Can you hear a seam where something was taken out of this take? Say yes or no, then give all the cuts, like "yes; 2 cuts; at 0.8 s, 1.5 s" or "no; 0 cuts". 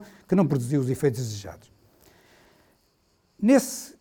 no; 0 cuts